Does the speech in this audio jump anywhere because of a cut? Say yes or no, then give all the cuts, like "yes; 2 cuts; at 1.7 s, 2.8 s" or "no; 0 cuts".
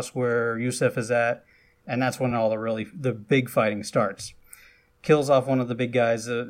no; 0 cuts